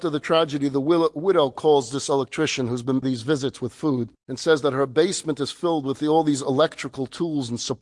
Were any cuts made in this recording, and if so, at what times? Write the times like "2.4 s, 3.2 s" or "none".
3.0 s